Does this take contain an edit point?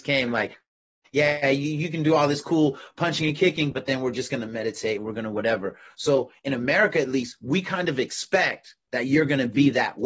no; 0 cuts

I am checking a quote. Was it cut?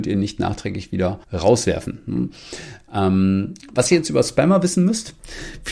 yes; 1 cut; at 1.2 s

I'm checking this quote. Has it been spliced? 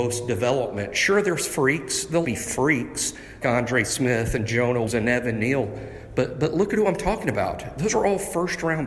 yes; 3 cuts; at 2.2 s, 3.4 s, 4.8 s

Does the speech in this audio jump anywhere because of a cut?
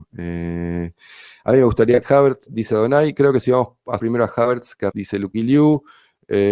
yes; 4 cuts; at 2.0 s, 2.5 s, 4.0 s, 4.9 s

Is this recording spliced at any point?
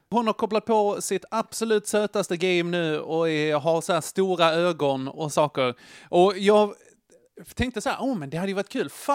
no; 0 cuts

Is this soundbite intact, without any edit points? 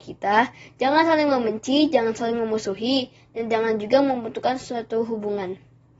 yes; 0 cuts

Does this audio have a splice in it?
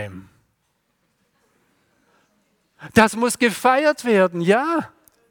no; 0 cuts

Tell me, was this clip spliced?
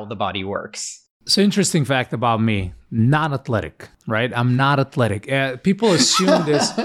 no; 0 cuts

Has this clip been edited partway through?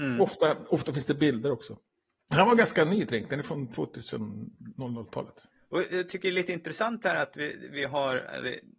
no; 0 cuts

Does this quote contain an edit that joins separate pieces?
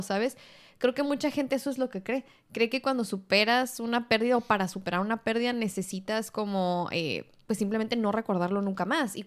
no; 0 cuts

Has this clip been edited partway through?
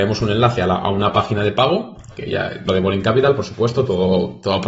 yes; 1 cut; at 2.7 s

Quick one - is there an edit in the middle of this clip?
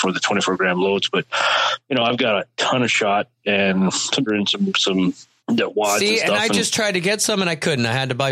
yes; 2 cuts; at 4.3 s, 5.4 s

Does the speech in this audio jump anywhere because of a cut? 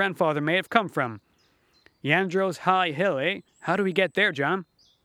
yes; 1 cut; at 3.5 s

